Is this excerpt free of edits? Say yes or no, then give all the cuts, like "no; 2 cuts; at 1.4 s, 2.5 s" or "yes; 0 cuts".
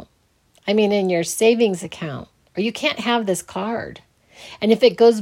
yes; 0 cuts